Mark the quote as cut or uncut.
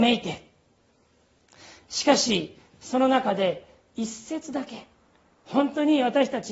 uncut